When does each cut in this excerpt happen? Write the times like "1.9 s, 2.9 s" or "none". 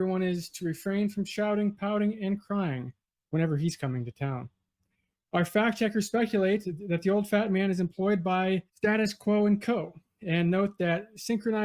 8.7 s